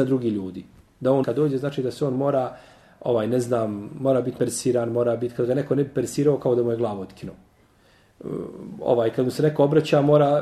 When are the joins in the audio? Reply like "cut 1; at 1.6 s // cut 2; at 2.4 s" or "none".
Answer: cut 1; at 1.2 s // cut 2; at 4.4 s